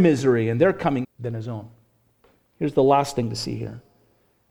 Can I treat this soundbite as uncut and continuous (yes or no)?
no